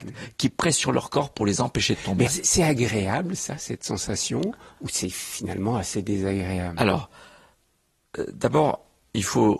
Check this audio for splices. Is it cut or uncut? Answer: cut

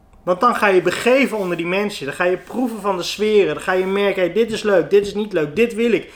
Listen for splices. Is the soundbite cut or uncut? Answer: uncut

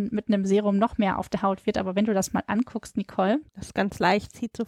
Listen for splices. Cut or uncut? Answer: cut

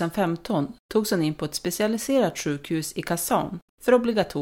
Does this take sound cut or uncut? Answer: uncut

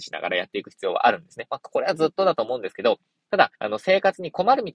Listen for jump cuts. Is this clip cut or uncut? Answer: cut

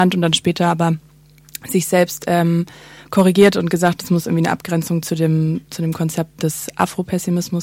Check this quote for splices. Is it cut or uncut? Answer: uncut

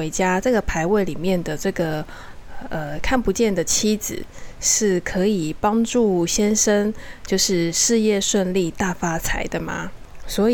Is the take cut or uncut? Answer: uncut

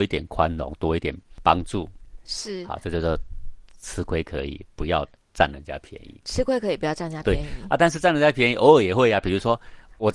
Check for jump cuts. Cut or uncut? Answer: uncut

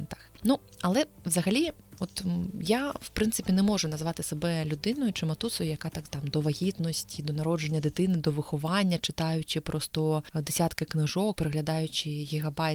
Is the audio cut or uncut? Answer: cut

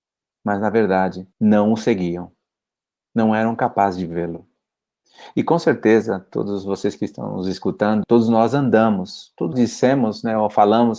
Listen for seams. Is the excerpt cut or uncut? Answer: cut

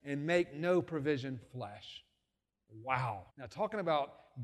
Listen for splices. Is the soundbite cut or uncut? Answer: cut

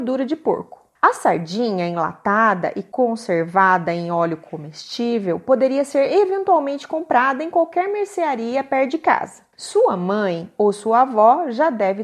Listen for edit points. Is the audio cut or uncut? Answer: uncut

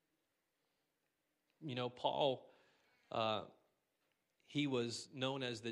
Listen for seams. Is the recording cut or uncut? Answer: uncut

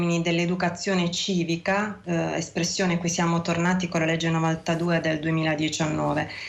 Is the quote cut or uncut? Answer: uncut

